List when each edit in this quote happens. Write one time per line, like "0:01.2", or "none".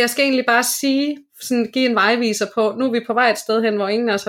none